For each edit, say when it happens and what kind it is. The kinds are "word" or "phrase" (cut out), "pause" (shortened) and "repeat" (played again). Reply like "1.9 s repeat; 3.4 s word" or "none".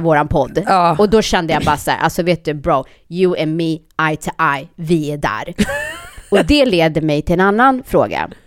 none

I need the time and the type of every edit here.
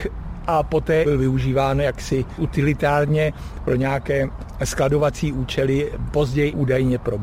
1.0 s phrase

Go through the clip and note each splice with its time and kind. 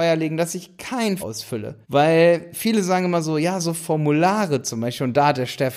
1.2 s word; 1.8 s pause

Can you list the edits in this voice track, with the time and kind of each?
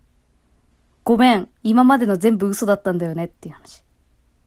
1.6 s pause

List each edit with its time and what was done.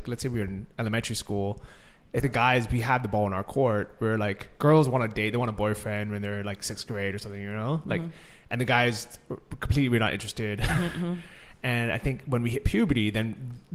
2.2 s word

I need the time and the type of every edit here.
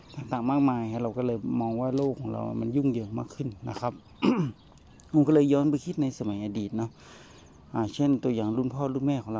none

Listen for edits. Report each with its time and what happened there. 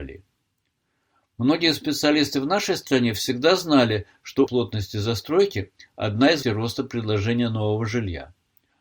4.5 s word; 6.4 s word

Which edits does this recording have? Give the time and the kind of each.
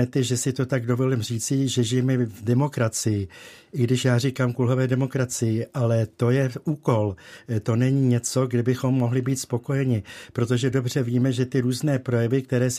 none

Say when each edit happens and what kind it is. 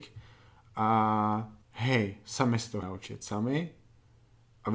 1.6 s pause; 2.8 s word

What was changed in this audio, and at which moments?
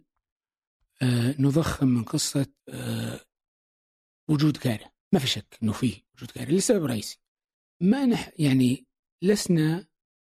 2.6 s pause; 5.0 s pause; 6.1 s pause; 7.5 s pause

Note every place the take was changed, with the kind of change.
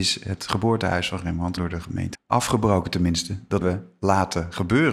1.6 s word; 2.1 s word; 3.6 s word

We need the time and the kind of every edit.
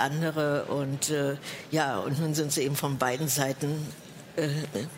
none

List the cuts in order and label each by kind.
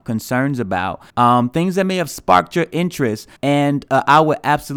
1.1 s pause; 3.4 s pause

